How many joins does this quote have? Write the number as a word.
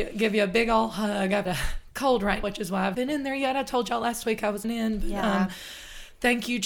four